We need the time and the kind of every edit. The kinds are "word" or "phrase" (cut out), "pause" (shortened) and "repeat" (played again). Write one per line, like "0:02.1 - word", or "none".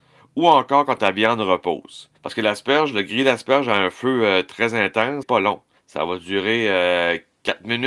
0:02.1 - pause
0:05.2 - word
0:05.8 - pause